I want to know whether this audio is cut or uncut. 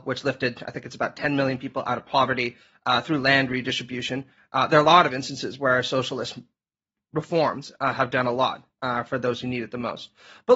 uncut